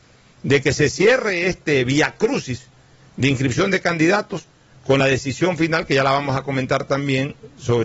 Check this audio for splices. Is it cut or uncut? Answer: uncut